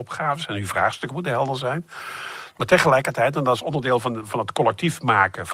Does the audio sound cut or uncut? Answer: uncut